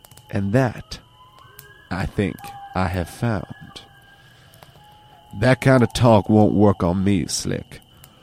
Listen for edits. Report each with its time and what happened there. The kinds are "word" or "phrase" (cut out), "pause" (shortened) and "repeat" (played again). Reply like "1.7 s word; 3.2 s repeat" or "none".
none